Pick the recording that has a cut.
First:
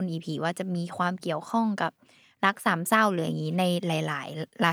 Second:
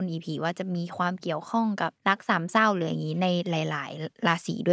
second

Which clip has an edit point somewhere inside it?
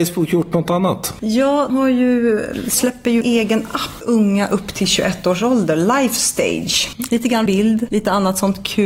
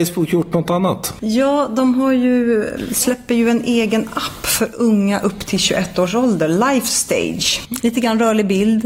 first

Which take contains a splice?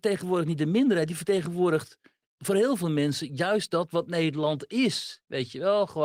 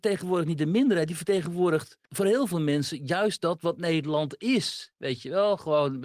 second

